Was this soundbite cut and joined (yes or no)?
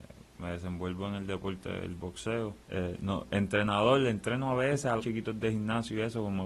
yes